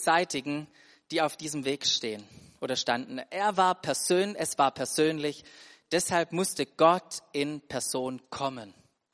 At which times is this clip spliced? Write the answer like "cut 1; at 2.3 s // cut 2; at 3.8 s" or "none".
none